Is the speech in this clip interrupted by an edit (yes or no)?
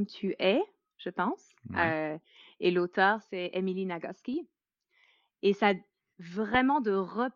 no